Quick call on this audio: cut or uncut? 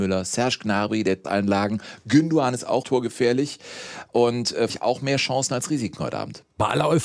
cut